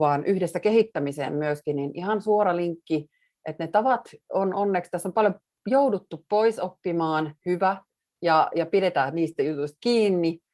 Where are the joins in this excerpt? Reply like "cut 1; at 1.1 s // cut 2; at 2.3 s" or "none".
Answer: cut 1; at 7.4 s